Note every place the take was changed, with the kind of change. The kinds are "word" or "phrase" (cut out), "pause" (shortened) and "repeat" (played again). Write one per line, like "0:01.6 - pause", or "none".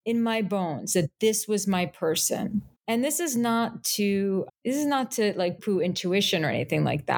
0:02.8 - pause
0:04.5 - word
0:05.6 - word